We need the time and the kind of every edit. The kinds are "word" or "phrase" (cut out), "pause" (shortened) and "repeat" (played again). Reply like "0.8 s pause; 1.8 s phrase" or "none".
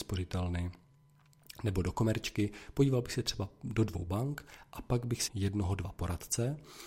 5.3 s word